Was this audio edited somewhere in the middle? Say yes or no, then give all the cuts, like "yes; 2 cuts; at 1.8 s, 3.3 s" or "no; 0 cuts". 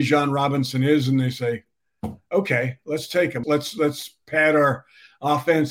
yes; 1 cut; at 3.4 s